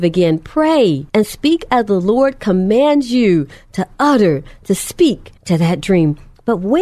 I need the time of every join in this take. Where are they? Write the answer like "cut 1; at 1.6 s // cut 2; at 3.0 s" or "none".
cut 1; at 1.1 s // cut 2; at 5.4 s